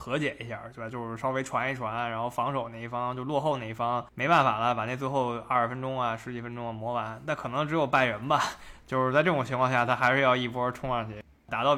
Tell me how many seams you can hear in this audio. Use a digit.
1